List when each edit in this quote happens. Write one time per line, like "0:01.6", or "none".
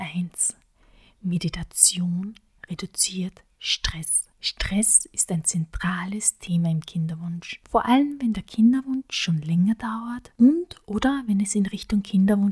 0:04.3